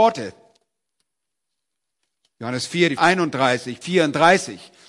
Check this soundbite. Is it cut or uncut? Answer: cut